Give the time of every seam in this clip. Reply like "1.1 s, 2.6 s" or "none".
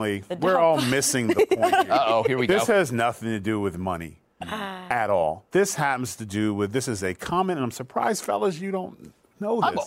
5.5 s